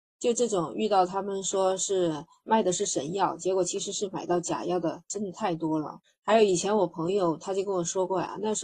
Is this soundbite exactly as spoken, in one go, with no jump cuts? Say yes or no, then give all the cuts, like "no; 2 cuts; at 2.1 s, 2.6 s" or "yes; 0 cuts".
no; 1 cut; at 6.0 s